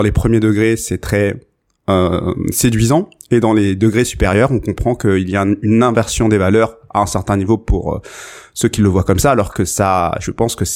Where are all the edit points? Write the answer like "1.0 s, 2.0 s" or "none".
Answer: none